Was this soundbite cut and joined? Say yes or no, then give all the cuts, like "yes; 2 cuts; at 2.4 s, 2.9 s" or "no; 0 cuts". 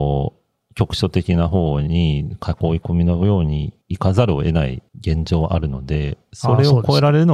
yes; 2 cuts; at 3.8 s, 4.9 s